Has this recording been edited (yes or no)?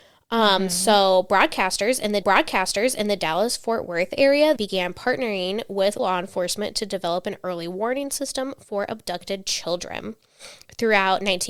yes